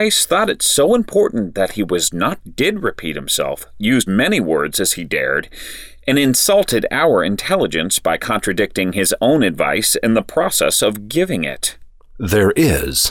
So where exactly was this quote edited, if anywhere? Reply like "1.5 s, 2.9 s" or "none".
2.4 s, 4.1 s